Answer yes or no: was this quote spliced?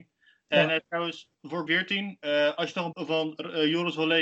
yes